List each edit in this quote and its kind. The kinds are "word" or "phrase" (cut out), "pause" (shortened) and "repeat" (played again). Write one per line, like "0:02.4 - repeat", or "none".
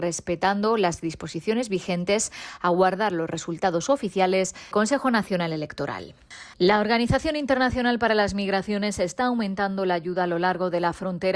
0:04.7 - word